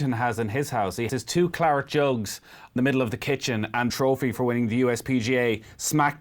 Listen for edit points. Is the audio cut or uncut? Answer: cut